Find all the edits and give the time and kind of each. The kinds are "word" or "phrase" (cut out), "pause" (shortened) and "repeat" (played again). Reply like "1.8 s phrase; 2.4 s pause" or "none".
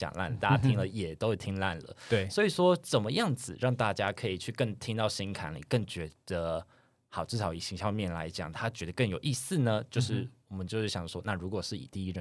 none